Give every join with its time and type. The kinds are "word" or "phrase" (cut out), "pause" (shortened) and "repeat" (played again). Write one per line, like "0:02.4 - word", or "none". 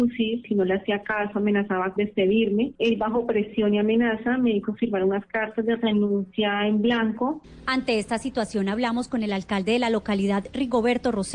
0:02.0 - word